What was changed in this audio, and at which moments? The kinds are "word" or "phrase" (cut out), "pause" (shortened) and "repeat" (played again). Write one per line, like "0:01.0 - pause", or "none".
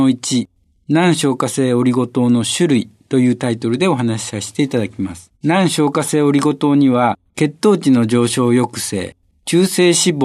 0:05.4 - pause
0:07.3 - pause